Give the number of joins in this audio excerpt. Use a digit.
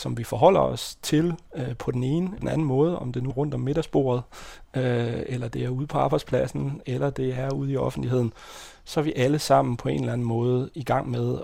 2